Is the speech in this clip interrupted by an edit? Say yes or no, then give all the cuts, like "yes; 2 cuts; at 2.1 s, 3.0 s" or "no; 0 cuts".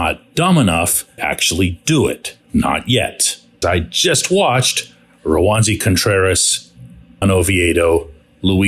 yes; 4 cuts; at 1.2 s, 2.4 s, 3.6 s, 7.2 s